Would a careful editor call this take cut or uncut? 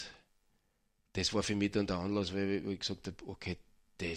uncut